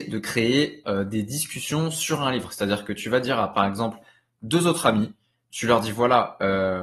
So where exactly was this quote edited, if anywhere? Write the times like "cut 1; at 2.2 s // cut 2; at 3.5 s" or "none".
none